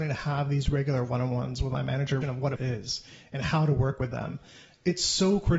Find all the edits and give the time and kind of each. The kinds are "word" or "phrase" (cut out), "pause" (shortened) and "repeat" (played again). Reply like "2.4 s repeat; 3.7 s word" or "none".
2.2 s phrase; 2.6 s word